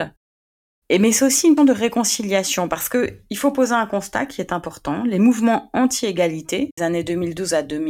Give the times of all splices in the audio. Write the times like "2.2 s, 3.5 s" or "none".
1.6 s, 6.8 s